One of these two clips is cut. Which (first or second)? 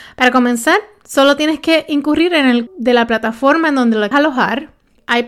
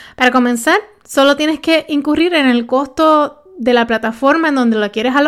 first